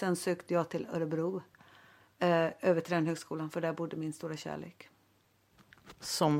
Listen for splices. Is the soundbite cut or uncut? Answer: uncut